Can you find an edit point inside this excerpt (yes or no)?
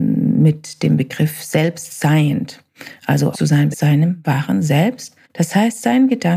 yes